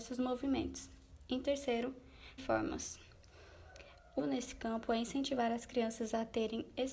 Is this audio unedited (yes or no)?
no